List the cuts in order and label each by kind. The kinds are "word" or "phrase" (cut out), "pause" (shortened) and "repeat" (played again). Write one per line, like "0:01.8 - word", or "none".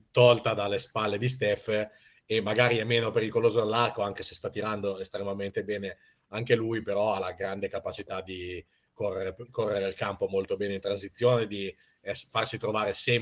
none

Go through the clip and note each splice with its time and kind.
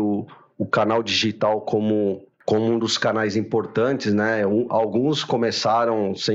none

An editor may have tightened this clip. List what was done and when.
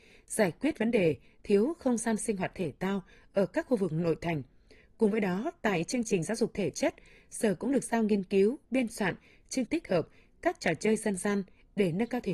0:09.7 - word

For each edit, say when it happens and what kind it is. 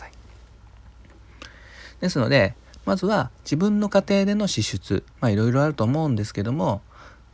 0:05.1 - pause

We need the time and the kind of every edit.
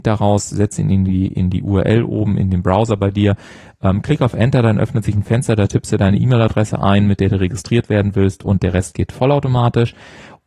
none

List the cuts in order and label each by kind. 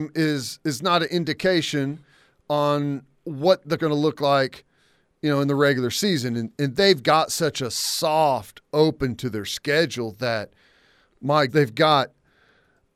0:03.8 - word
0:11.5 - word

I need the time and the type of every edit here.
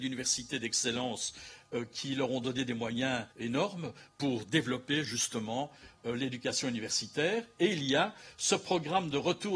0:03.3 - pause

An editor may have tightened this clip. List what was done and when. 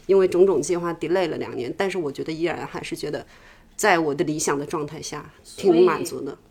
none

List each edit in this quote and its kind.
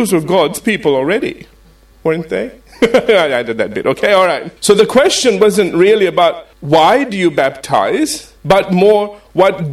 0:04.6 - pause
0:06.5 - pause
0:08.4 - pause

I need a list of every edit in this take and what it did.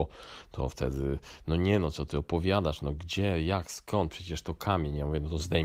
none

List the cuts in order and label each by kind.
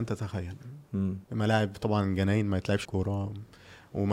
0:01.2 - pause
0:02.8 - word

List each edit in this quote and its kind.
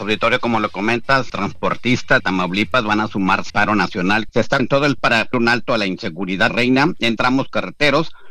0:01.3 - word
0:02.2 - word
0:03.5 - word
0:04.3 - word
0:04.6 - word
0:05.0 - word
0:05.3 - word
0:06.5 - word
0:07.2 - word

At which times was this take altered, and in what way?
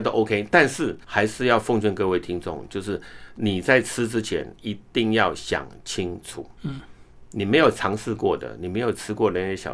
0:01.0 - pause
0:06.6 - pause

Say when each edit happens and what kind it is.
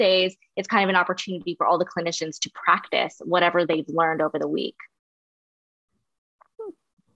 none

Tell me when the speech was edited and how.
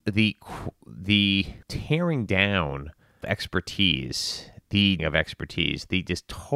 0:01.6 - pause
0:03.2 - word
0:05.0 - word

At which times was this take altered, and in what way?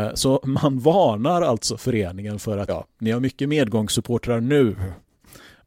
0:02.7 - word

